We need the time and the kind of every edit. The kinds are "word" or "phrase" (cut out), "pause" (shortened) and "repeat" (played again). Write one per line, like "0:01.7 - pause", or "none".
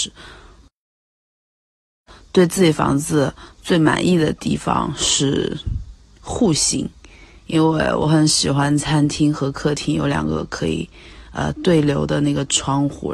none